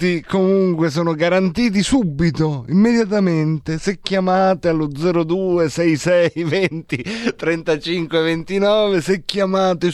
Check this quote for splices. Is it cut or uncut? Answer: uncut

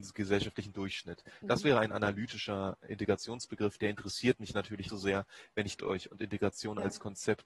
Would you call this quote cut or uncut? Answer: cut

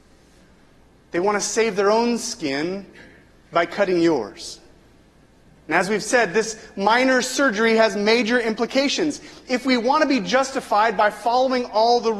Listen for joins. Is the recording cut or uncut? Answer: uncut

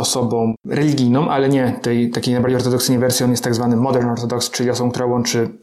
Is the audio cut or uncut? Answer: uncut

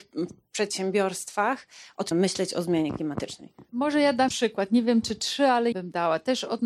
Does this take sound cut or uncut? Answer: cut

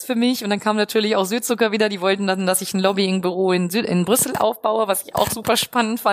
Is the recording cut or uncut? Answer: uncut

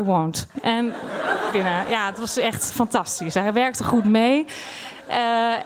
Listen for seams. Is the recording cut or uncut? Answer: cut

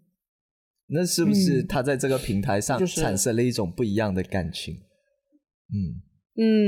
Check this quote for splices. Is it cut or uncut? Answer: cut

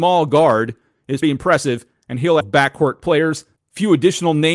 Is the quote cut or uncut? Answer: cut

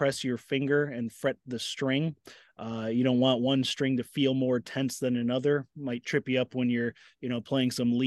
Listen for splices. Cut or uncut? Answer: uncut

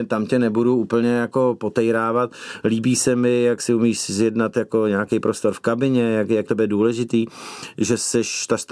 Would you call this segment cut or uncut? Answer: cut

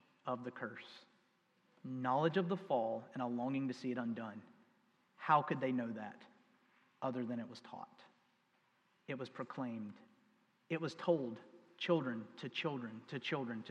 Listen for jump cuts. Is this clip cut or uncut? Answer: uncut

